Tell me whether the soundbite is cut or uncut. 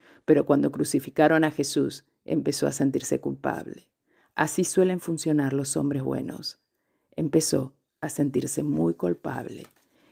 uncut